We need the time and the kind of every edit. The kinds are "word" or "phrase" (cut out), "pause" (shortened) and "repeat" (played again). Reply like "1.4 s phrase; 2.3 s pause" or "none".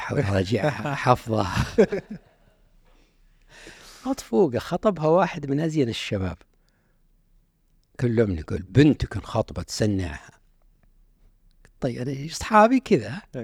none